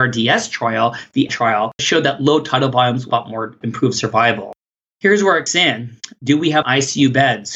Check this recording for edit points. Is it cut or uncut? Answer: cut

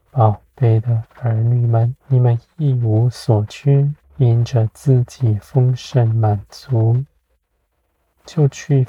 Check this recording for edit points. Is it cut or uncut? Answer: cut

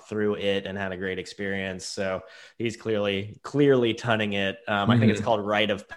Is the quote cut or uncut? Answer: uncut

